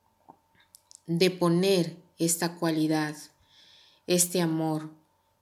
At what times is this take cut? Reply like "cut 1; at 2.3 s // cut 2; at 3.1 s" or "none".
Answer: none